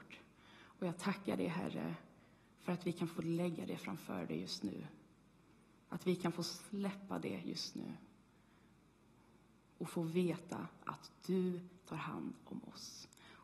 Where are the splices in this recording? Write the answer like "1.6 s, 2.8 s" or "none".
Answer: none